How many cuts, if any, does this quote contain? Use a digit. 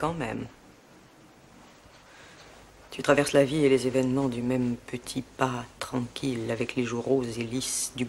0